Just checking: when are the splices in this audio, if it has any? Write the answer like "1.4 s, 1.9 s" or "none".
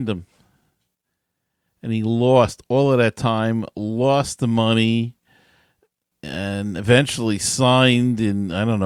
none